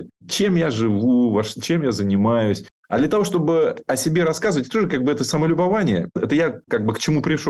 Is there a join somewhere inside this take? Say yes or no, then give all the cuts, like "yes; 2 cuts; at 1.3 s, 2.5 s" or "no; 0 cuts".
no; 0 cuts